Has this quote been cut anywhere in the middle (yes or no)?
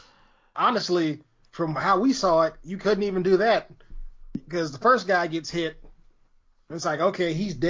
no